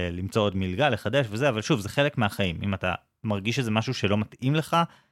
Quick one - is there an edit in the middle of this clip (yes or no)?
no